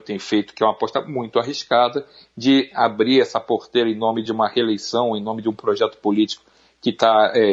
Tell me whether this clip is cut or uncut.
uncut